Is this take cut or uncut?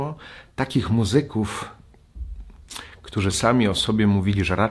uncut